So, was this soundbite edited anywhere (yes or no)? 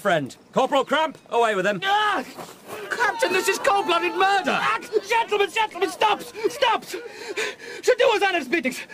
no